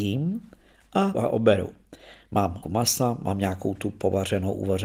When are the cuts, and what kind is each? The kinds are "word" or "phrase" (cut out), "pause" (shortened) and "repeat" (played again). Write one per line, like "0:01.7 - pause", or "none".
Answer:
0:01.1 - word
0:02.6 - word